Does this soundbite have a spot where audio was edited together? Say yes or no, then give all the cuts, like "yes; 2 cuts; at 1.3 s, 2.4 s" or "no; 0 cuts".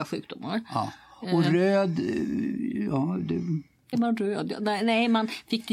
yes; 1 cut; at 3.9 s